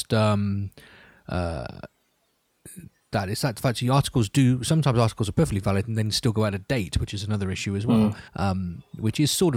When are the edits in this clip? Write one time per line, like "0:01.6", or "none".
0:08.3